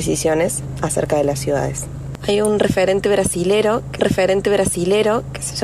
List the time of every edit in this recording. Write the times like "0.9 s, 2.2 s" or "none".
4.0 s